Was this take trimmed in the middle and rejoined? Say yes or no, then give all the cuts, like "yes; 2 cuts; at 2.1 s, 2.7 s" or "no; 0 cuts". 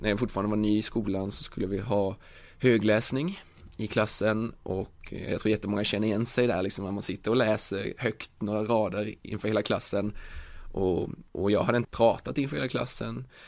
yes; 2 cuts; at 11.3 s, 11.8 s